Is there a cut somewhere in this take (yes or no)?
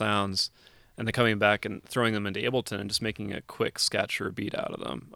no